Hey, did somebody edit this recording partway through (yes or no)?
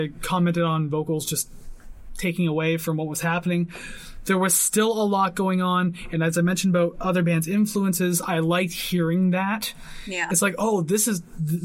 no